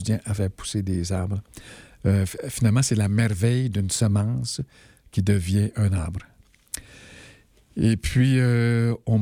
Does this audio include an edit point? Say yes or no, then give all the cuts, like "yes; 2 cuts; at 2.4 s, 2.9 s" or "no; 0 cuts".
no; 0 cuts